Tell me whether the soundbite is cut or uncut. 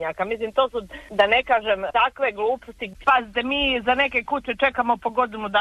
uncut